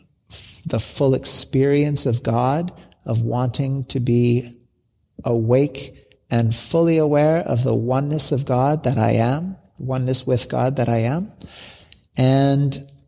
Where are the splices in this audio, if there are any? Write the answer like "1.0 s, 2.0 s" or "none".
none